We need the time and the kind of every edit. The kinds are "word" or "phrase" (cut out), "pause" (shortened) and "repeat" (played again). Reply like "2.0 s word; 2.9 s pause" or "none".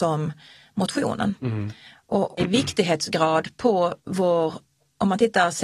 2.4 s phrase; 4.0 s pause

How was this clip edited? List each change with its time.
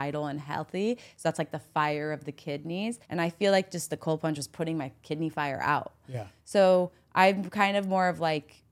3.0 s pause

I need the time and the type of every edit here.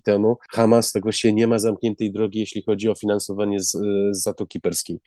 none

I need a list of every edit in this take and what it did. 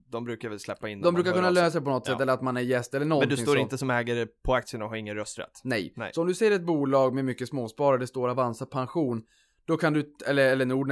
none

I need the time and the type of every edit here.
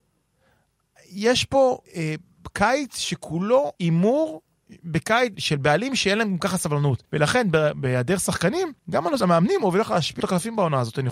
1.9 s pause; 3.7 s pause; 5.3 s word; 7.0 s pause; 8.8 s pause; 9.2 s word; 10.2 s phrase

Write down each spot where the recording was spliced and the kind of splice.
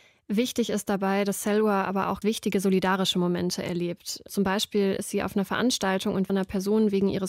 2.2 s word; 6.3 s phrase

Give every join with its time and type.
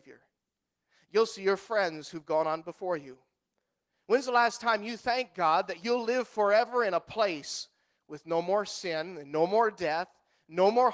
none

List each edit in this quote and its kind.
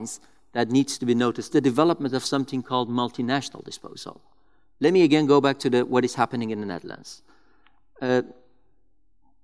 1.5 s phrase

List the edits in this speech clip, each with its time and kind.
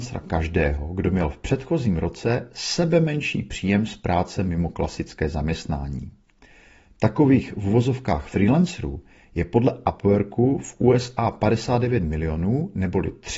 none

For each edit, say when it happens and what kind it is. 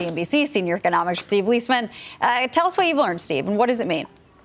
1.2 s word

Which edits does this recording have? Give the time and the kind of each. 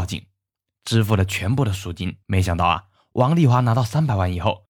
2.2 s pause

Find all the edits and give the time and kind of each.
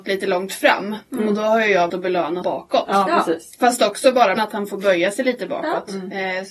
1.9 s word; 2.4 s word; 4.4 s phrase

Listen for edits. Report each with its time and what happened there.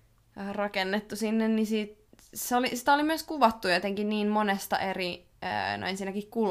2.1 s pause

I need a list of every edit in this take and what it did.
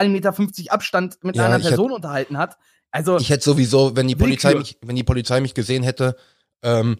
none

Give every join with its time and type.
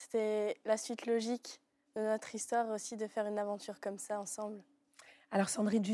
none

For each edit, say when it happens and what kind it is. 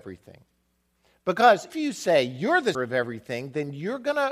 1.7 s word; 2.7 s word

